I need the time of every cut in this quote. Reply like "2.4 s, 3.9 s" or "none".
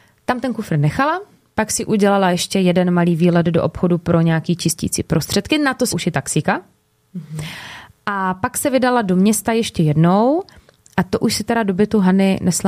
5.9 s